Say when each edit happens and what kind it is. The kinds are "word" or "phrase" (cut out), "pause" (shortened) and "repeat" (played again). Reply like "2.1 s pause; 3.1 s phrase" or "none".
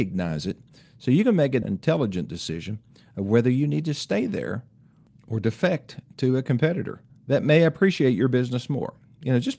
1.6 s word; 7.1 s pause